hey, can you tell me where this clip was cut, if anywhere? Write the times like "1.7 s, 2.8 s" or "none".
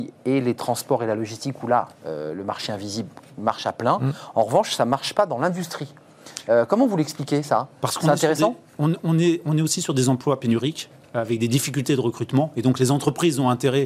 none